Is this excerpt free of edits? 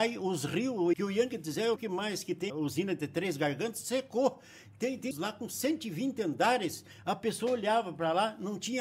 no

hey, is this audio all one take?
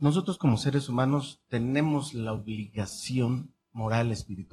no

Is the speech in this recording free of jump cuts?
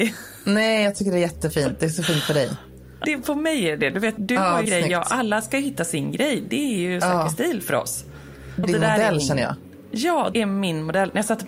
no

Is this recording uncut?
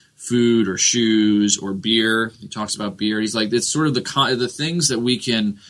yes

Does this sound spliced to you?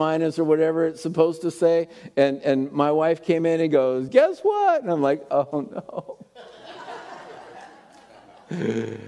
no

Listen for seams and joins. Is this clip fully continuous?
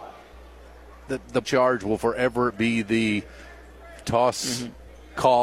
no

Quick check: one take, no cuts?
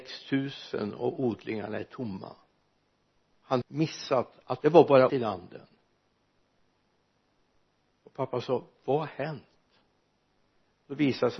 no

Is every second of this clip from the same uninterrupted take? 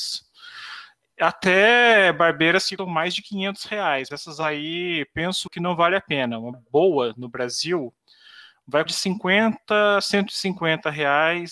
no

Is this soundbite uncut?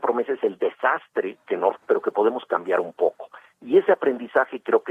no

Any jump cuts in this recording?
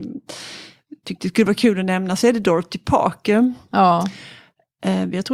no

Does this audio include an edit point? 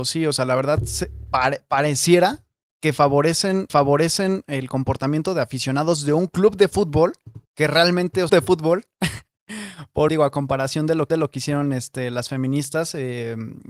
yes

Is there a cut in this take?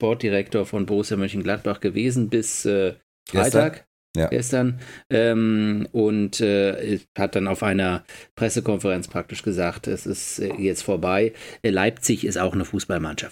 no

